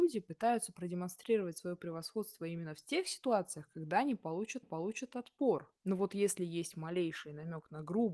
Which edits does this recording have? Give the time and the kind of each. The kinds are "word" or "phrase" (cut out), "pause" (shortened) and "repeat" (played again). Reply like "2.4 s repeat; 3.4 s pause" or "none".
4.6 s repeat